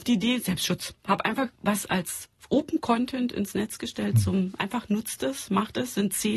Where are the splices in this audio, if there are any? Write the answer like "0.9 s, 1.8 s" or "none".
1.5 s